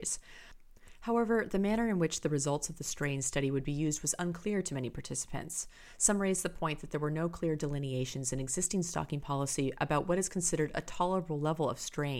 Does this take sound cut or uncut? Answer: uncut